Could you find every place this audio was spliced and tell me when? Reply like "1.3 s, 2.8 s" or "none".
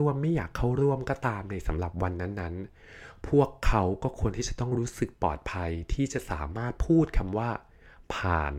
none